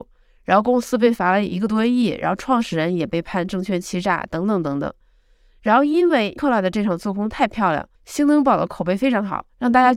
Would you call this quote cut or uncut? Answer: cut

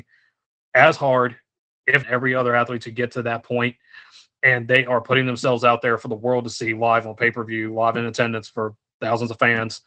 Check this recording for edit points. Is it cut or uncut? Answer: cut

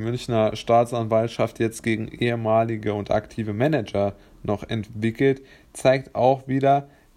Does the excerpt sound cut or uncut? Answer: uncut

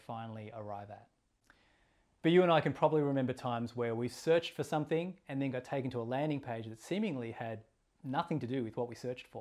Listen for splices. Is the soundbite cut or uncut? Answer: uncut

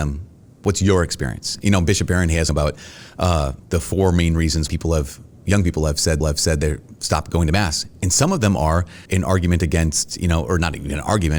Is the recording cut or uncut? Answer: cut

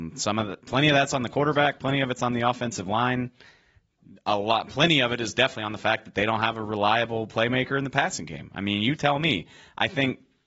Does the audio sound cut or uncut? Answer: uncut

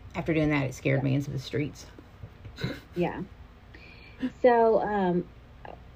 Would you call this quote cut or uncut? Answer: cut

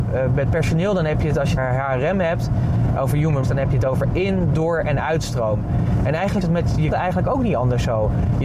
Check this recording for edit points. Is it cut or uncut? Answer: cut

